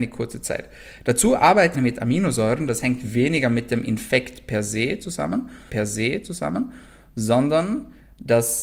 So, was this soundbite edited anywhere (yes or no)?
yes